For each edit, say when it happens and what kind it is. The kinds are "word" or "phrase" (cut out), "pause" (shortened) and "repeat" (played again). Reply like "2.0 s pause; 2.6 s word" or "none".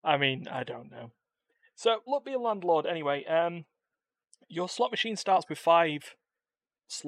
2.1 s word